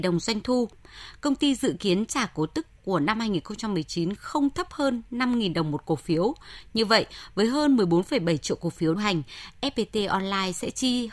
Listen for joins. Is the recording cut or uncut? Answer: cut